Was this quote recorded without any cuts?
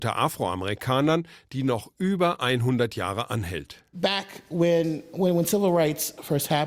yes; 0 cuts

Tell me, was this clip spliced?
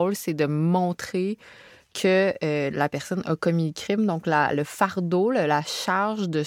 no; 0 cuts

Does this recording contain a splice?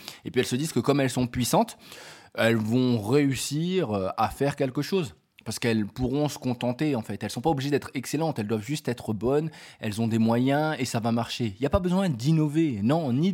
no; 0 cuts

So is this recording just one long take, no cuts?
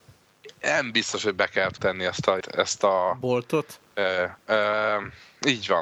no; 3 cuts; at 1.8 s, 2.4 s, 4.4 s

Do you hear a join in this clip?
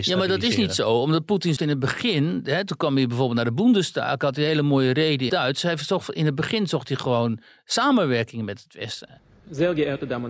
yes; 2 cuts; at 1.6 s, 5.3 s

